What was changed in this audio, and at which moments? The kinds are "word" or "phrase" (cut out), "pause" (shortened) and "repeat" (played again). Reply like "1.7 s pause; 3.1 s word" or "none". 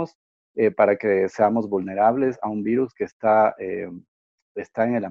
none